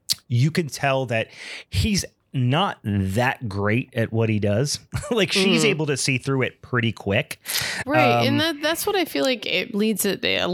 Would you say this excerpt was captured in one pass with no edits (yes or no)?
yes